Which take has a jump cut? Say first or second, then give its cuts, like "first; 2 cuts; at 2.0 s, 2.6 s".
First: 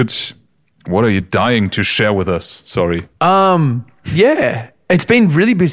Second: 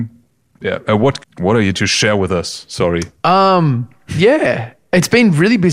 second; 2 cuts; at 1.2 s, 1.7 s